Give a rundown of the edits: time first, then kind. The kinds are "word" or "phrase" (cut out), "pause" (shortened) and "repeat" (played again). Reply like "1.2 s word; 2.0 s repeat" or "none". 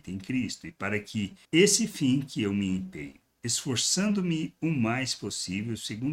1.4 s pause